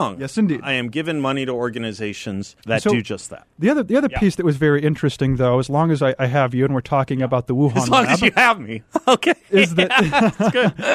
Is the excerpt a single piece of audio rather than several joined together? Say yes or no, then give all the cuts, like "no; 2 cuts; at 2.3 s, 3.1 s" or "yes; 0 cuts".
no; 1 cut; at 2.6 s